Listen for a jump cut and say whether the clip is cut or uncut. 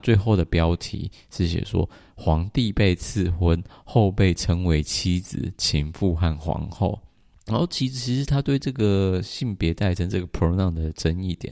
uncut